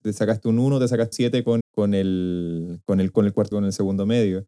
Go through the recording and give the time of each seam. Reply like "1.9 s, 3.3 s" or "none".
1.1 s, 1.6 s, 3.1 s, 3.5 s